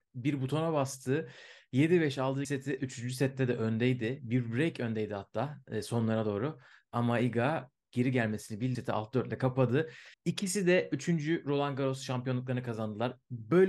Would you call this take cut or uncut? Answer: cut